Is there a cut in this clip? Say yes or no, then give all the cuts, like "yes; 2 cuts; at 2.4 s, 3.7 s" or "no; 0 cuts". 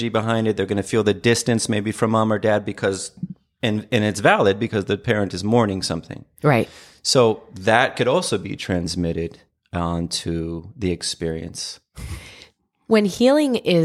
no; 0 cuts